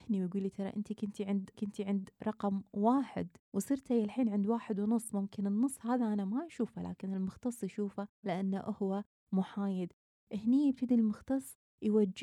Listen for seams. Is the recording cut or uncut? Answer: cut